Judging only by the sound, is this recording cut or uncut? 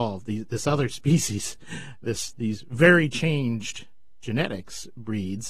uncut